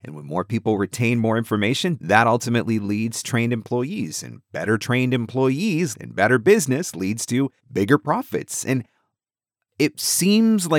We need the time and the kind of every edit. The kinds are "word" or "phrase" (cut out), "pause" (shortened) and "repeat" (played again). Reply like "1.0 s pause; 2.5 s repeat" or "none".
3.2 s phrase; 5.9 s phrase; 7.6 s pause